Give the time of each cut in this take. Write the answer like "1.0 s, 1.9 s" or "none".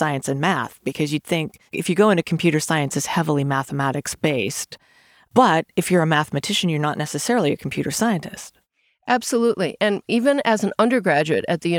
1.7 s